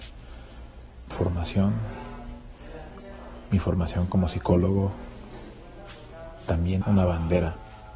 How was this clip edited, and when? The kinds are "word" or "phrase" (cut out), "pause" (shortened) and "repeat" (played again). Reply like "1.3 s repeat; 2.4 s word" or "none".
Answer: 1.1 s word; 6.8 s word